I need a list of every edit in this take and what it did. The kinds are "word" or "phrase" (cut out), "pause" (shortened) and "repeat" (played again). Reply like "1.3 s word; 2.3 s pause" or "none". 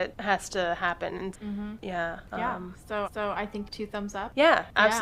1.3 s word; 3.0 s repeat; 3.7 s word